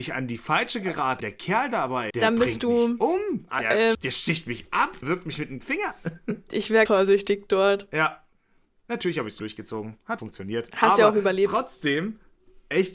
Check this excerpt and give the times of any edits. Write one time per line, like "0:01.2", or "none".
0:01.2
0:02.1
0:03.6
0:03.9
0:05.0
0:05.6
0:06.9
0:09.4
0:10.2